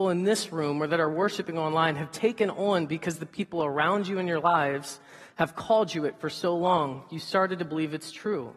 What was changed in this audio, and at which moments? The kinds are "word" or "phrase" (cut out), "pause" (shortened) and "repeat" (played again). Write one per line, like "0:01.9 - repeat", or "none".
none